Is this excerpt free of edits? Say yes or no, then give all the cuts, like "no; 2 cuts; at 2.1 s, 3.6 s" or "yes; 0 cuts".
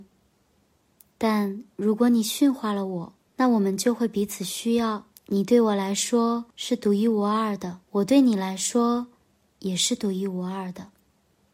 no; 4 cuts; at 3.3 s, 5.2 s, 6.5 s, 7.8 s